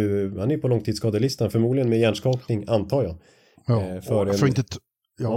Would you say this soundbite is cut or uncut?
uncut